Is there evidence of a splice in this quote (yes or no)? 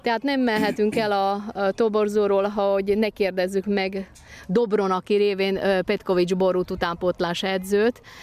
no